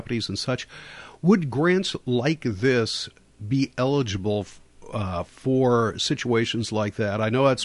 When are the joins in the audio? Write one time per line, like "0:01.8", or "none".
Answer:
none